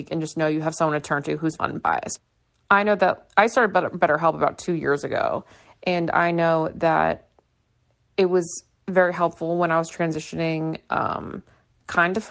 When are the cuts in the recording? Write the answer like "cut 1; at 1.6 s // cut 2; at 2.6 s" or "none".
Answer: cut 1; at 1.6 s